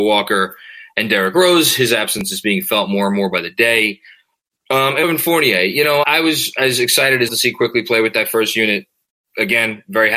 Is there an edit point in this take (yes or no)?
yes